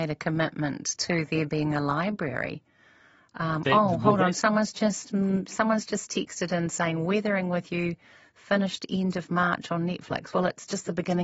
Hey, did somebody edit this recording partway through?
no; 0 cuts

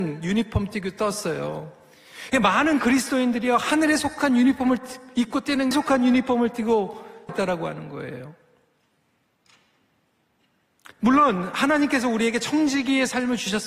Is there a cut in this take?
yes; 2 cuts; at 5.7 s, 7.3 s

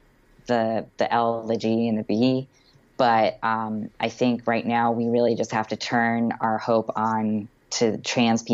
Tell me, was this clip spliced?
no; 0 cuts

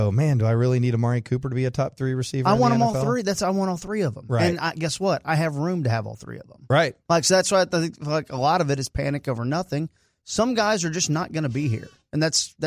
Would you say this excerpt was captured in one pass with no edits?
yes; 0 cuts

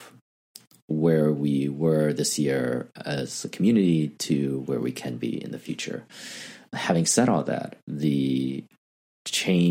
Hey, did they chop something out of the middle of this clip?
no; 0 cuts

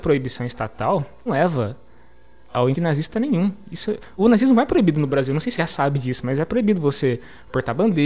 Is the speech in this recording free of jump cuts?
no; 4 cuts; at 1.3 s, 2.7 s, 4.2 s, 5.6 s

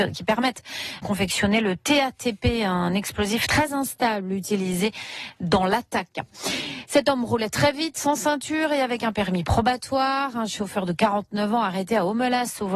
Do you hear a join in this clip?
yes; 1 cut; at 1.0 s

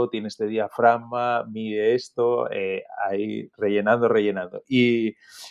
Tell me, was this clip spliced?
no; 0 cuts

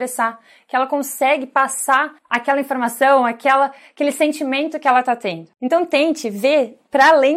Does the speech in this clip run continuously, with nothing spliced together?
no; 1 cut; at 2.2 s

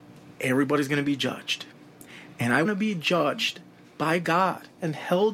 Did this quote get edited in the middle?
yes; 1 cut; at 2.6 s

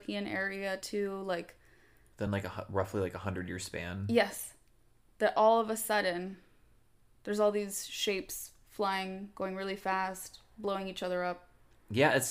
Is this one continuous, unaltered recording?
yes; 0 cuts

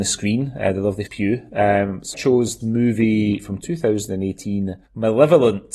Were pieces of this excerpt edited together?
yes; 3 cuts; at 1.1 s, 2.1 s, 2.6 s

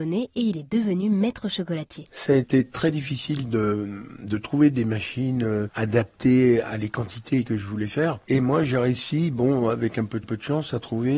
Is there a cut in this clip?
yes; 3 cuts; at 2.1 s, 6.6 s, 10.2 s

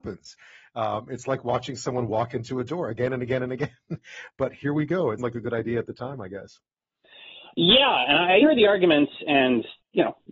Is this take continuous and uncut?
no; 2 cuts; at 5.2 s, 8.4 s

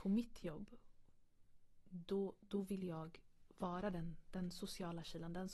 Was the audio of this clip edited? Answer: no; 0 cuts

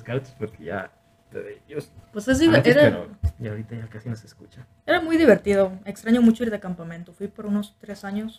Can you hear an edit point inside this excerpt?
yes; 2 cuts; at 1.3 s, 2.0 s

